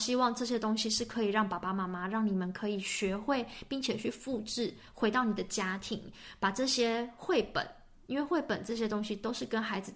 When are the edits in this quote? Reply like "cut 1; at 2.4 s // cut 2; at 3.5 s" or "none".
none

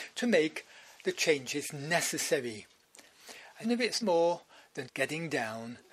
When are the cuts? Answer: cut 1; at 3.6 s // cut 2; at 4.0 s // cut 3; at 4.9 s

